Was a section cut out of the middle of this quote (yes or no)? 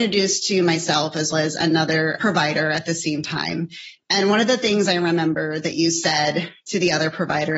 yes